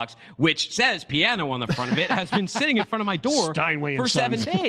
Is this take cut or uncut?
uncut